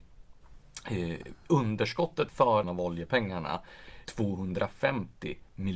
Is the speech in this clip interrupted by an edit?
yes; 3 cuts; at 2.3 s, 2.6 s, 4.1 s

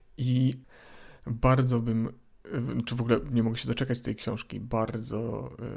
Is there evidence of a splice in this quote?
no; 0 cuts

